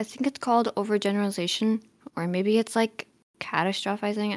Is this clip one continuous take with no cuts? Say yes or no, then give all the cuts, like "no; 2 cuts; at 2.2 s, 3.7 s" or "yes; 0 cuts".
yes; 0 cuts